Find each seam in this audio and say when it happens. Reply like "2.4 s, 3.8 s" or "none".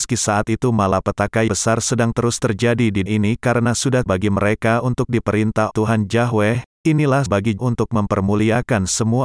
1.5 s, 3.1 s, 3.7 s, 4.1 s, 5.7 s, 6.7 s, 7.3 s, 7.6 s